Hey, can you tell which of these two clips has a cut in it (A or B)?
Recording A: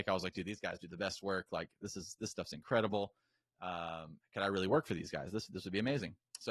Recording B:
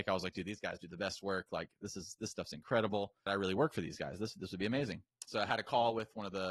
B